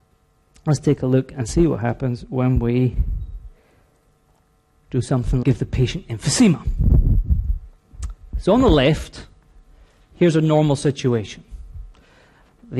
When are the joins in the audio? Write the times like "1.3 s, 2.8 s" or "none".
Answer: 5.4 s